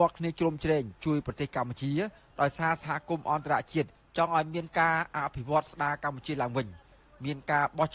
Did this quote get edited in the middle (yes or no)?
no